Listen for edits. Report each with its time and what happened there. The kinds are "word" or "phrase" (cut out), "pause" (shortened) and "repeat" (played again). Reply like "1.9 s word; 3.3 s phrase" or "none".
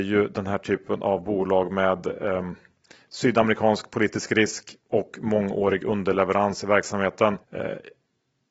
4.8 s pause; 7.4 s pause